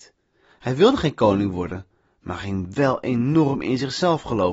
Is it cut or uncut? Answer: uncut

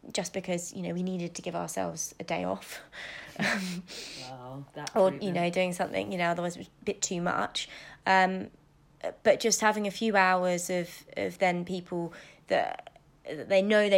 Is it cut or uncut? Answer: uncut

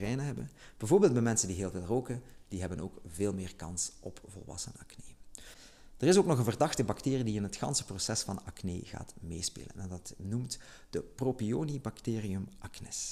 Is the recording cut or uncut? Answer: uncut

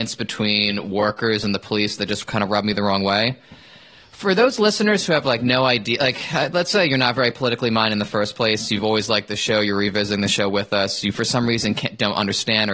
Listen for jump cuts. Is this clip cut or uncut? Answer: uncut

